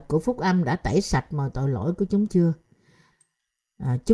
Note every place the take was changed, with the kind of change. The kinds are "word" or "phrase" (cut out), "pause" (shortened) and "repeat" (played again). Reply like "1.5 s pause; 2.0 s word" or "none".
2.3 s word